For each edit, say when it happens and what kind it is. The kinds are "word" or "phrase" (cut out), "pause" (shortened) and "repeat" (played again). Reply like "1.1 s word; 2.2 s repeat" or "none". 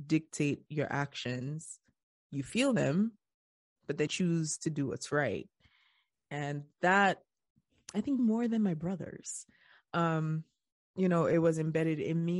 4.1 s word; 8.2 s word